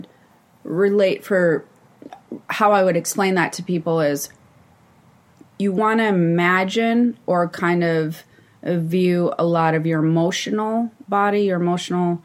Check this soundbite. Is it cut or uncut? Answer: uncut